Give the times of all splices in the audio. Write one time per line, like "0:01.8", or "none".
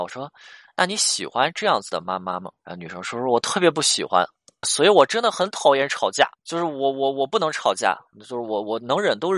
0:02.6
0:04.6
0:06.3